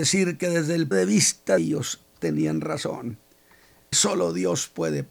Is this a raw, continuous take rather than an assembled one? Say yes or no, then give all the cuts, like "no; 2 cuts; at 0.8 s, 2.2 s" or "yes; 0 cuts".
no; 3 cuts; at 0.9 s, 1.6 s, 3.9 s